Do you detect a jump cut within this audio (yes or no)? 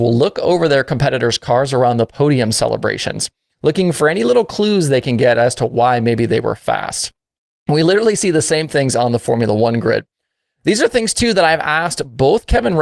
no